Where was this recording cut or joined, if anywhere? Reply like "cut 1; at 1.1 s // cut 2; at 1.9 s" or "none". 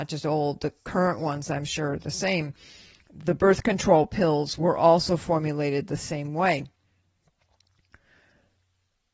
none